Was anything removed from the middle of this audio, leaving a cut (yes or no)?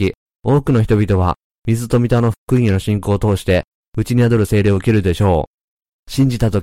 no